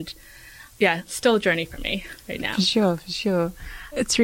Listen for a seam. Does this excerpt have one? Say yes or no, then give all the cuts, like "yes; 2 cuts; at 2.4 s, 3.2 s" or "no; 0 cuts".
no; 0 cuts